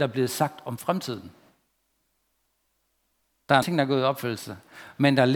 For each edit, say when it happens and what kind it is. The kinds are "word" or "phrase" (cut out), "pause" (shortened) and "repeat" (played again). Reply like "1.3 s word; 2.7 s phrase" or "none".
3.6 s word